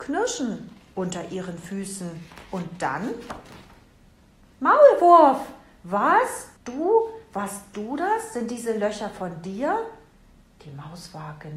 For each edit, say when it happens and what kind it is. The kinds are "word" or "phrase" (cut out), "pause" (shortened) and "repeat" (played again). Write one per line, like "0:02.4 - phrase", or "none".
0:06.6 - pause